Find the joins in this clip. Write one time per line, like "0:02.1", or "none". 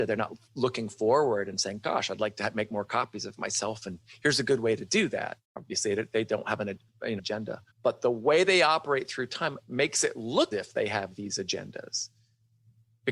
0:05.4
0:07.2
0:07.7
0:10.5